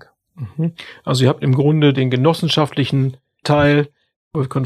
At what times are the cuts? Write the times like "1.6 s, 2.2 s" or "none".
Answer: 3.4 s